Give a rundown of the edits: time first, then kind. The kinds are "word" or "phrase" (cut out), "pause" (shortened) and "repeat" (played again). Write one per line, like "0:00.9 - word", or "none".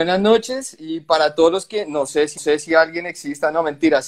0:02.4 - repeat